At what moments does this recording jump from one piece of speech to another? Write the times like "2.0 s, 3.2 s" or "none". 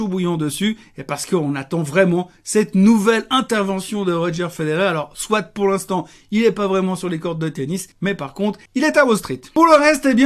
7.9 s, 8.7 s